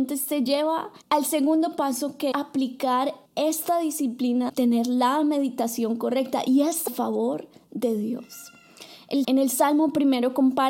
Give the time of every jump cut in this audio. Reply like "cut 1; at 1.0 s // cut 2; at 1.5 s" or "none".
cut 1; at 1.0 s // cut 2; at 2.3 s // cut 3; at 3.3 s // cut 4; at 4.5 s // cut 5; at 6.9 s // cut 6; at 9.2 s